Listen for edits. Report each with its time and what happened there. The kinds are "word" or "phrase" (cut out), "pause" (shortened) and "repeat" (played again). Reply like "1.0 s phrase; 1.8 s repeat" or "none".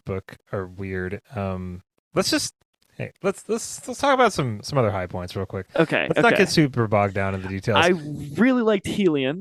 none